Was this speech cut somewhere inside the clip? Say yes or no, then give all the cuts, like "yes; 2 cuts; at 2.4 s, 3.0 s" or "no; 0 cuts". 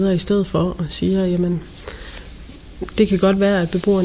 no; 0 cuts